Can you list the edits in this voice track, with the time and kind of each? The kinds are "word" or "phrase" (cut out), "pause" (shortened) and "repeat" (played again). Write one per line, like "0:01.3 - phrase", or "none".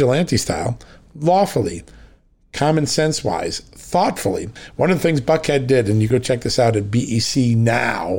0:06.1 - word